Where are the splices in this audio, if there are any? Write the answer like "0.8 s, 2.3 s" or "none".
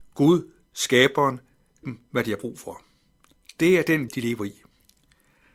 1.8 s, 4.1 s